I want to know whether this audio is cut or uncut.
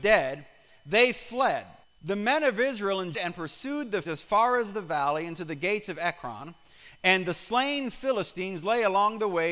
cut